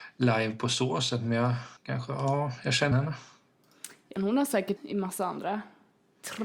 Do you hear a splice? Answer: yes; 4 cuts; at 1.8 s, 2.9 s, 4.2 s, 4.8 s

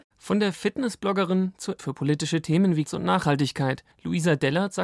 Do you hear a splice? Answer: yes; 3 cuts; at 1.8 s, 2.9 s, 3.9 s

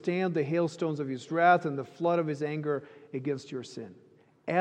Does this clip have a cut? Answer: no; 0 cuts

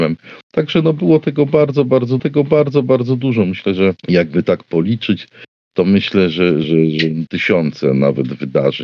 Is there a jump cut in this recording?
yes; 5 cuts; at 2.2 s, 4.0 s, 5.6 s, 6.6 s, 7.3 s

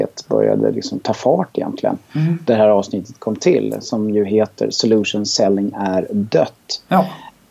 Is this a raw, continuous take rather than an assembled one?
yes; 0 cuts

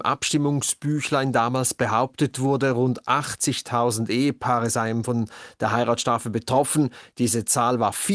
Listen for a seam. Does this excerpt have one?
no; 0 cuts

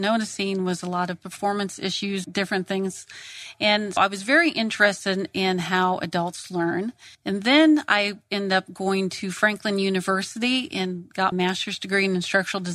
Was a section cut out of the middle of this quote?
yes; 4 cuts; at 2.2 s, 4.0 s, 7.1 s, 11.3 s

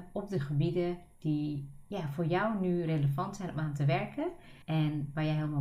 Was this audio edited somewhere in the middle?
yes; 1 cut; at 4.6 s

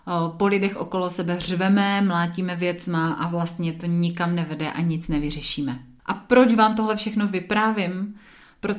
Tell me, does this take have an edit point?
no; 0 cuts

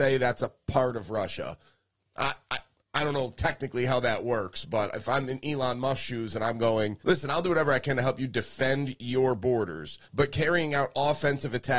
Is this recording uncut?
no; 2 cuts; at 7.0 s, 10.0 s

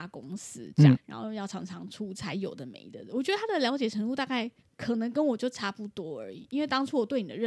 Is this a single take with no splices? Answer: no; 2 cuts; at 0.9 s, 4.6 s

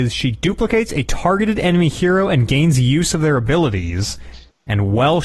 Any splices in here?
no; 0 cuts

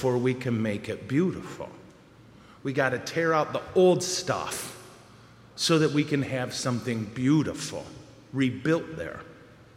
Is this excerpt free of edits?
yes; 0 cuts

